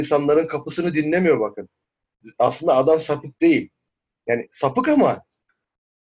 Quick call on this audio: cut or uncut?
uncut